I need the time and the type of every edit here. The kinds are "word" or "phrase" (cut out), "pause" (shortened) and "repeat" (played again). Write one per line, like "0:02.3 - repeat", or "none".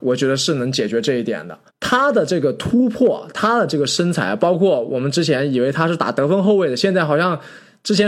0:01.7 - pause